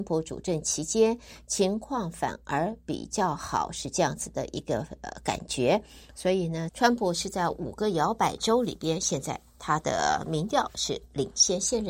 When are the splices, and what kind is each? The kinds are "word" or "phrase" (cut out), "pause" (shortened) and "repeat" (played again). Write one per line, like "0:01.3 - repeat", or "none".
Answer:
0:06.7 - phrase